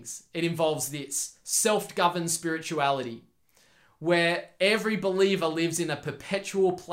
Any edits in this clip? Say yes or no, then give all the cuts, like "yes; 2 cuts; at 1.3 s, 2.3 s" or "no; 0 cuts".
no; 0 cuts